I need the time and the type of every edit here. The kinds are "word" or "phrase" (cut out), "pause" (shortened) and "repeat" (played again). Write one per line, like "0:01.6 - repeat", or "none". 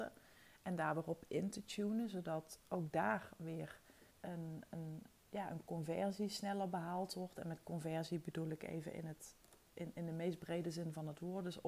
0:04.1 - pause

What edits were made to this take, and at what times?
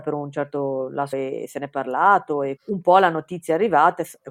0:01.1 - phrase
0:02.6 - word

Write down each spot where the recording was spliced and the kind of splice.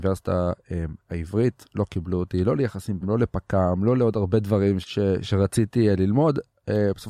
0:03.0 - word
0:04.8 - word

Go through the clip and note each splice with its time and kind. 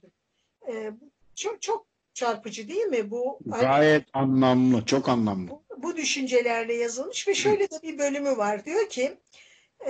0:01.2 - pause

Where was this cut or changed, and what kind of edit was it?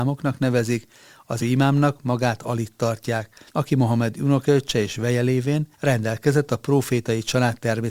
0:01.4 - word
0:03.5 - pause
0:05.7 - pause

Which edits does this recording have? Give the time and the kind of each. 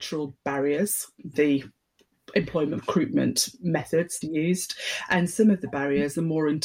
0:01.3 - word
0:02.8 - phrase
0:04.2 - word

